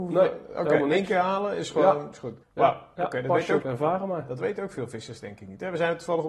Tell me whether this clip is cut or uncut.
cut